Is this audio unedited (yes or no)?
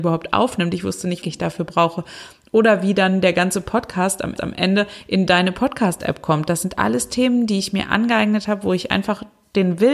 no